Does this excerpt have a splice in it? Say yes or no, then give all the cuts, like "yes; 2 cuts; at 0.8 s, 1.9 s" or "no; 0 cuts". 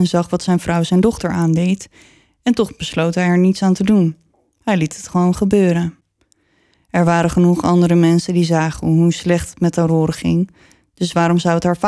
no; 0 cuts